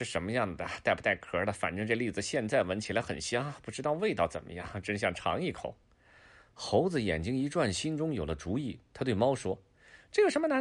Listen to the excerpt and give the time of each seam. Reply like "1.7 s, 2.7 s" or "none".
none